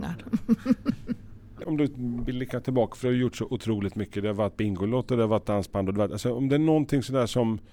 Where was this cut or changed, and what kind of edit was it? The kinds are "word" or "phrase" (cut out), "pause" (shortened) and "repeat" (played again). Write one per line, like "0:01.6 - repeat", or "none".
none